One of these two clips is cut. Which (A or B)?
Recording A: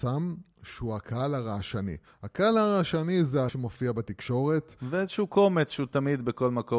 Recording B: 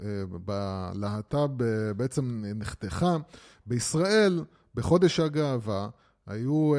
A